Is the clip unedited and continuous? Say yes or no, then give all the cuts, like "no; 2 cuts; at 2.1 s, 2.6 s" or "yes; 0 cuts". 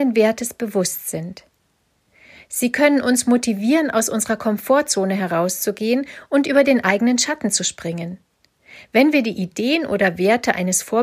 yes; 0 cuts